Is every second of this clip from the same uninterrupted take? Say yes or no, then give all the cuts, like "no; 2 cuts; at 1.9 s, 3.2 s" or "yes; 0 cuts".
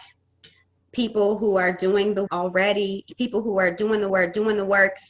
no; 2 cuts; at 2.3 s, 4.1 s